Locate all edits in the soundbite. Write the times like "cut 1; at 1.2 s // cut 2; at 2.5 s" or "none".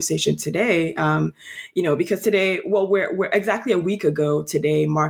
none